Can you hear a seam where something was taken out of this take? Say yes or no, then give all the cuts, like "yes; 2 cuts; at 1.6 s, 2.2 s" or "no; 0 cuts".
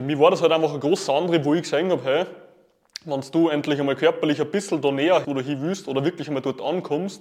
yes; 1 cut; at 5.2 s